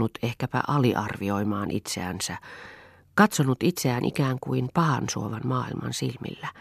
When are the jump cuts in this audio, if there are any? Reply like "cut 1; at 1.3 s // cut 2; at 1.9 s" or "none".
none